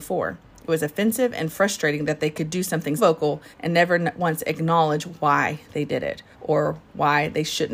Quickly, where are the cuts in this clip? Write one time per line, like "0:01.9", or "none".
0:03.0
0:03.5
0:06.3